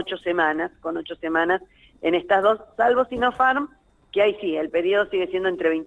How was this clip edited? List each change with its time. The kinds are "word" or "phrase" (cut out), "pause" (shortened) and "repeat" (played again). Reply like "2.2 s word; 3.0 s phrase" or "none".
none